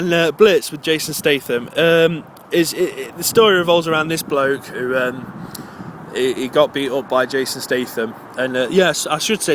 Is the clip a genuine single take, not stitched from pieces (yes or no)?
yes